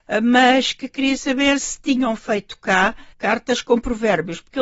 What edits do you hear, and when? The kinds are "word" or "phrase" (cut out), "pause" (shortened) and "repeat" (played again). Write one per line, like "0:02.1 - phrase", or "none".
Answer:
0:01.6 - word
0:03.1 - pause

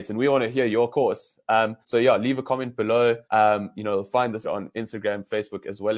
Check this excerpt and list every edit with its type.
0:00.9 - phrase
0:01.8 - pause
0:03.2 - pause
0:04.4 - word

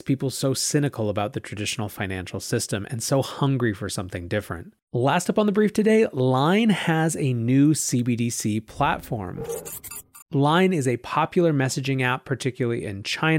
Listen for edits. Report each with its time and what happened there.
0:04.8 - pause
0:10.2 - pause

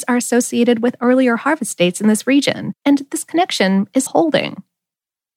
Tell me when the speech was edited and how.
0:02.8 - pause
0:04.1 - word

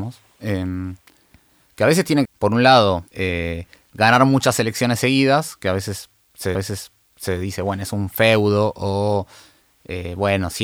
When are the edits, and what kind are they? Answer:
0:02.2 - phrase
0:03.1 - pause
0:06.5 - repeat

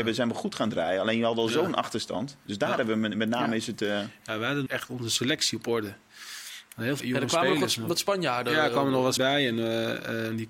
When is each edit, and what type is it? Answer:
0:04.7 - phrase
0:07.0 - word
0:09.2 - word

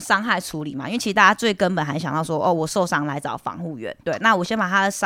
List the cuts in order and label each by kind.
0:04.0 - pause

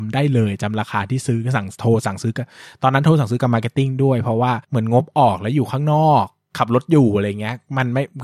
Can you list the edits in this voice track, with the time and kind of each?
0:04.6 - pause

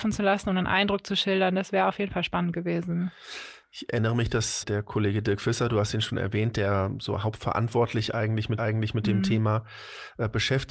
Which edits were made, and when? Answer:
0:04.6 - word
0:08.6 - repeat

